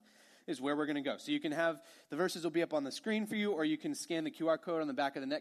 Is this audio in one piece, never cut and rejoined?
yes; 0 cuts

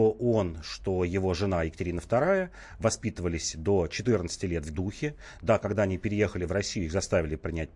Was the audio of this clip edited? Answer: yes; 1 cut; at 4.7 s

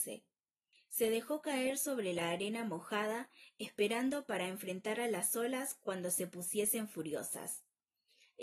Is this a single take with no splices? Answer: yes; 0 cuts

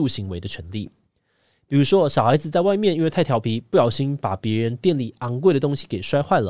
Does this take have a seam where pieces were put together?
no; 0 cuts

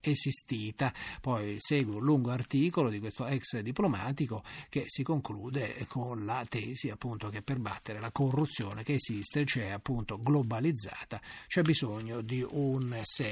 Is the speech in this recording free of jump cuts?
yes; 0 cuts

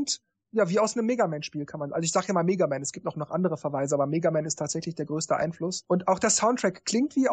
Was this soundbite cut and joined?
no; 0 cuts

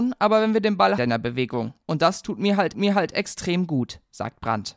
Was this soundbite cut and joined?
yes; 2 cuts; at 1.0 s, 2.7 s

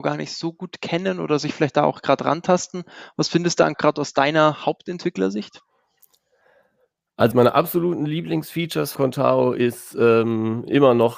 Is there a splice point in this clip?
yes; 3 cuts; at 3.7 s, 7.3 s, 8.9 s

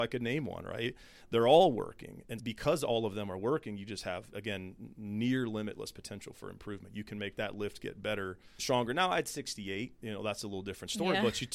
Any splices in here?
yes; 3 cuts; at 2.4 s, 4.3 s, 8.6 s

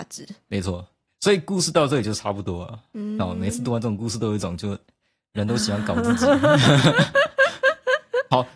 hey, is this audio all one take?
yes; 0 cuts

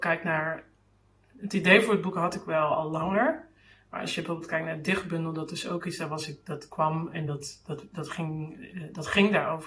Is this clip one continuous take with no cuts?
yes; 0 cuts

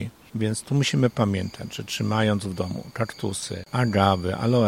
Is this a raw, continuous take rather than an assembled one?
yes; 0 cuts

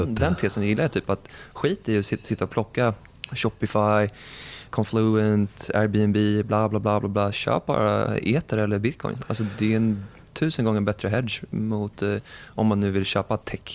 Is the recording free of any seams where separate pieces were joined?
yes; 0 cuts

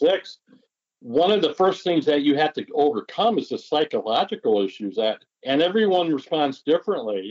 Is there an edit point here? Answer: yes; 1 cut; at 5.3 s

